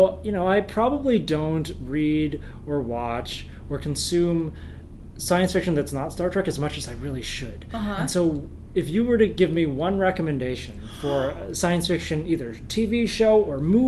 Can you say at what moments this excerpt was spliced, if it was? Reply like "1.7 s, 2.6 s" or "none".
none